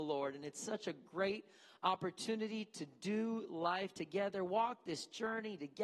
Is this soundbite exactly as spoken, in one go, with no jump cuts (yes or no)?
yes